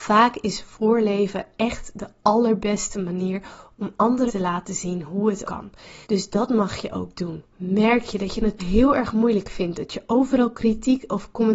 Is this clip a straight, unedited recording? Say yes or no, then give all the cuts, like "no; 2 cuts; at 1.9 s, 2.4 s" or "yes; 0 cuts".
no; 5 cuts; at 4.3 s, 5.4 s, 6.0 s, 7.5 s, 8.6 s